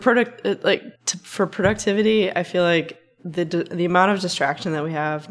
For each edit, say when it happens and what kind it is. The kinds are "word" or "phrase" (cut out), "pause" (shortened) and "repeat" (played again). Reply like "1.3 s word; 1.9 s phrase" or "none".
1.0 s pause